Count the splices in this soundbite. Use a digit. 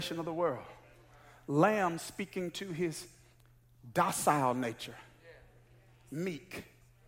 0